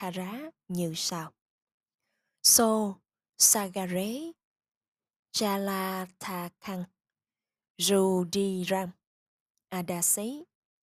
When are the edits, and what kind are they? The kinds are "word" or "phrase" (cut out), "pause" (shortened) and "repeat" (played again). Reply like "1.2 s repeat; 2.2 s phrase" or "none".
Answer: none